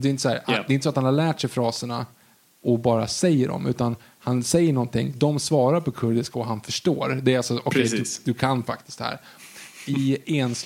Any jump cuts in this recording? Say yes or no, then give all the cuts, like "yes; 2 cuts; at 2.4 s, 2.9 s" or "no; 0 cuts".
no; 0 cuts